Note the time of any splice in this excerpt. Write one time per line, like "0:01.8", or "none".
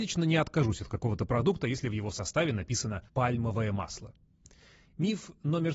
0:03.1